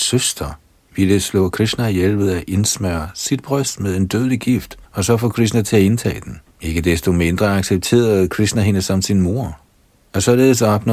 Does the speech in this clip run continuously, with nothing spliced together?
no; 2 cuts; at 4.8 s, 6.5 s

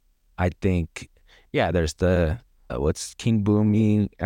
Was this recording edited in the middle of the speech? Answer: yes; 1 cut; at 2.7 s

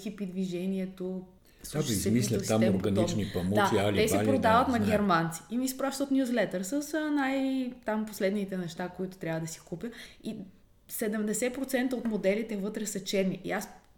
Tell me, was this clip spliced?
no; 0 cuts

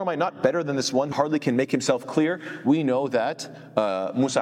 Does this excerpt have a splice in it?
yes; 1 cut; at 1.1 s

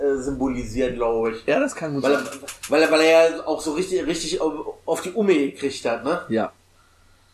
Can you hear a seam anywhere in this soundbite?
no; 0 cuts

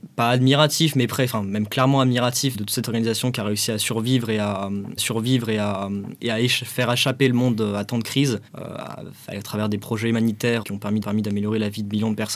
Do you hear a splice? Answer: yes; 5 cuts; at 2.5 s, 5.0 s, 8.5 s, 10.6 s, 11.0 s

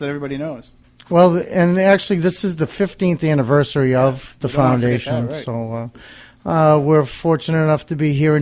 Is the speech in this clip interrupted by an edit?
no; 0 cuts

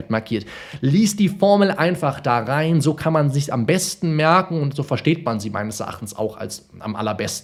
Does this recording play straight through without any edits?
yes; 0 cuts

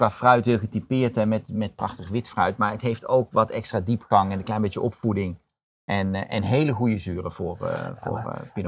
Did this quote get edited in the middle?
no; 0 cuts

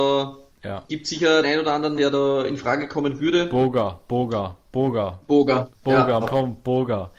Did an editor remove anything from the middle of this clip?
yes; 3 cuts; at 1.4 s, 2.0 s, 6.2 s

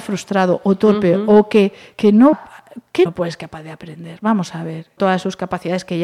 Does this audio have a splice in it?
yes; 4 cuts; at 1.9 s, 2.3 s, 3.1 s, 5.0 s

